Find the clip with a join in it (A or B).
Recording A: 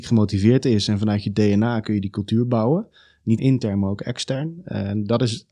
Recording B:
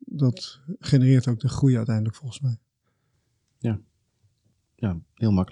A